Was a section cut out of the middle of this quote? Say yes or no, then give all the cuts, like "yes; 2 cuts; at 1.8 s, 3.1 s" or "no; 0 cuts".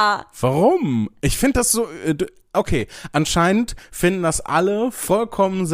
no; 0 cuts